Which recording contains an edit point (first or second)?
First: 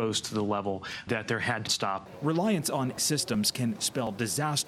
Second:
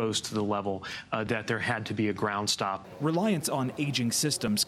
first